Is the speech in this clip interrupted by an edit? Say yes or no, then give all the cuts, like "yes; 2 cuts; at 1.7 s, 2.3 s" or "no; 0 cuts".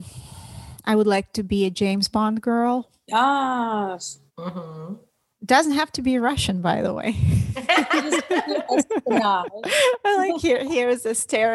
yes; 1 cut; at 4.3 s